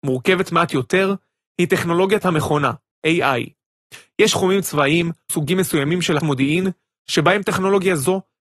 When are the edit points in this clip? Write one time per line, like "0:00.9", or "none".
0:02.2
0:04.3
0:05.3
0:06.2

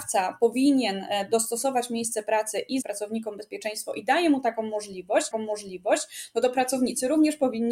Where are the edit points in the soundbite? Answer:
0:02.8
0:05.3

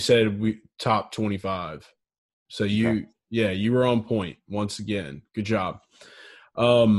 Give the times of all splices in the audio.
none

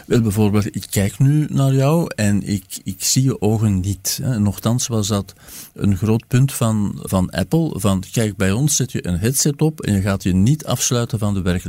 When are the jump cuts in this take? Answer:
0:07.1

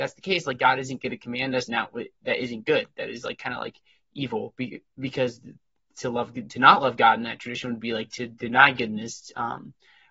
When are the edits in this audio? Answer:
0:01.7

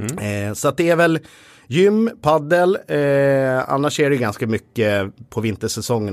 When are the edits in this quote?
none

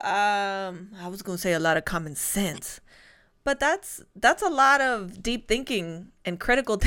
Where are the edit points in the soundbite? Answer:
none

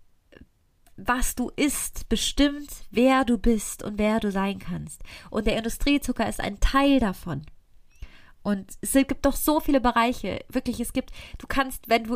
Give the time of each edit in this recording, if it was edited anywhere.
none

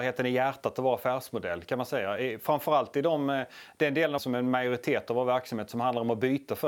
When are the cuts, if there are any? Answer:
0:04.2

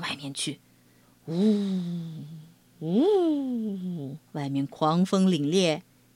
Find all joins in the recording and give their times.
0:04.3

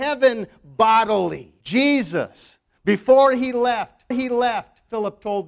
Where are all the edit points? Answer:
0:01.6
0:04.1

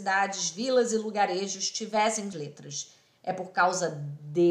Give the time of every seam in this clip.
0:02.3

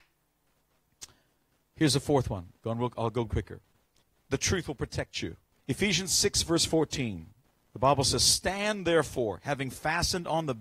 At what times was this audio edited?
0:03.3
0:04.0
0:05.5

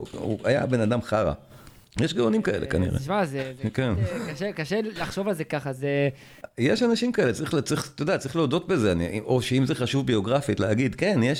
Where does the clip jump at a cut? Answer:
0:01.8

